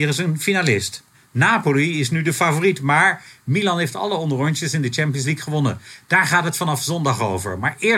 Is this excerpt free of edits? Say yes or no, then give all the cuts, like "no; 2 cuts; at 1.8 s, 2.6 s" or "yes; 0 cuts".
no; 1 cut; at 1.1 s